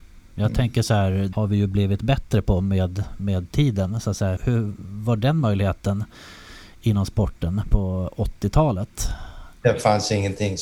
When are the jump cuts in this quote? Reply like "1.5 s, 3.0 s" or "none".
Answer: 1.3 s, 4.4 s